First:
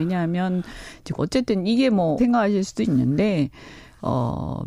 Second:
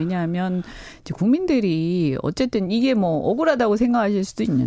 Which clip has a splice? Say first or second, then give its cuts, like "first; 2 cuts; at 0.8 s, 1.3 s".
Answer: first; 2 cuts; at 1.2 s, 2.2 s